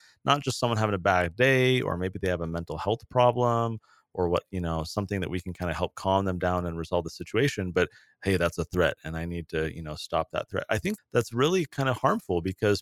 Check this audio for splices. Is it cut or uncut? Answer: cut